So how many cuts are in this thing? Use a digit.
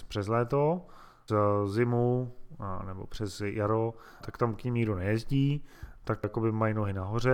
3